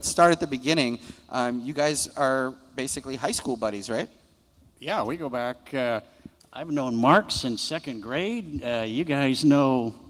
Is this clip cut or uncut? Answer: uncut